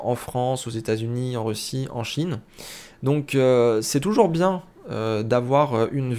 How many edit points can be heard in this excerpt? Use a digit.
0